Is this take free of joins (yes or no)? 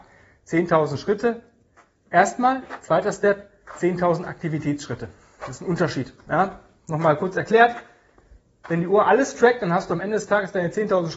yes